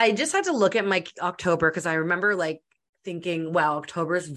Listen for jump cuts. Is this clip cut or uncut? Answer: uncut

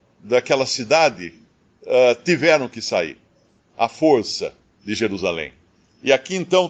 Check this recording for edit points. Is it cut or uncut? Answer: uncut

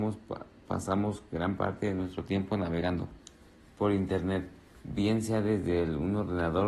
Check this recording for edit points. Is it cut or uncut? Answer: uncut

